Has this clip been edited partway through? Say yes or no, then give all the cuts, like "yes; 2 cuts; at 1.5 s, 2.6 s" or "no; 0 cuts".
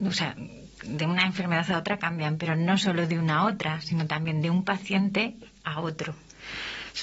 no; 0 cuts